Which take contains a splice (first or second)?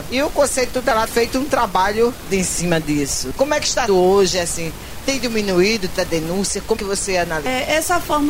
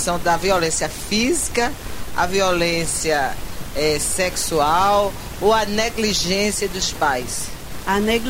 first